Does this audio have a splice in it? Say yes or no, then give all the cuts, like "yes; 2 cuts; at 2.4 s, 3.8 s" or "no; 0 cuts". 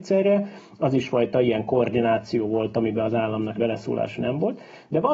yes; 1 cut; at 3.6 s